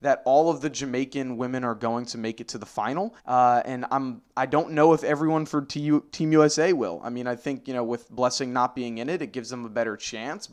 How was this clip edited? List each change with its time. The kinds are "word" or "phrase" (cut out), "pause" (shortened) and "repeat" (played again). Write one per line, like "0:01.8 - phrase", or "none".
0:03.2 - pause